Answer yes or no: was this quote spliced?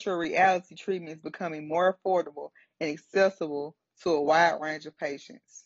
no